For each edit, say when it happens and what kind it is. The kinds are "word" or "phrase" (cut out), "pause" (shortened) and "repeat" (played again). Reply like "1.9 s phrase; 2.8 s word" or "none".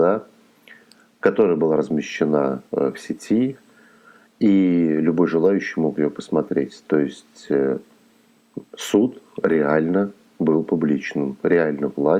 2.7 s pause